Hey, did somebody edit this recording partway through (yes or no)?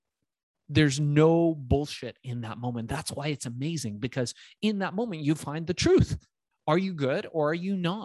no